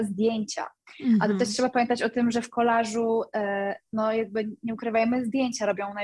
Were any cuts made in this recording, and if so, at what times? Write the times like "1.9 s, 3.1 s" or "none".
none